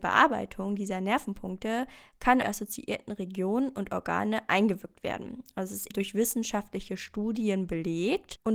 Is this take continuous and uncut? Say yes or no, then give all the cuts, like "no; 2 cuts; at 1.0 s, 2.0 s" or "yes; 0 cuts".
no; 2 cuts; at 2.4 s, 5.9 s